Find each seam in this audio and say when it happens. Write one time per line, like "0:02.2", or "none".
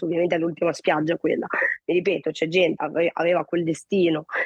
0:02.8